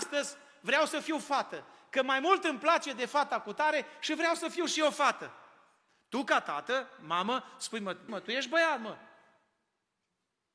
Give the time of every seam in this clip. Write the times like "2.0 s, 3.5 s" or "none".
8.1 s